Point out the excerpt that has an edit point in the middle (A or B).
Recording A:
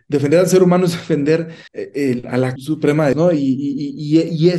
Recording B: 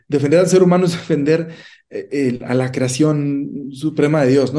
A